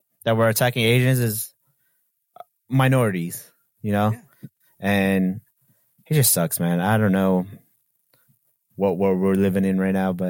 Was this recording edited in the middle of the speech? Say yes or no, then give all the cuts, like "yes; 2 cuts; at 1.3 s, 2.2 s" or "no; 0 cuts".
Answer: no; 0 cuts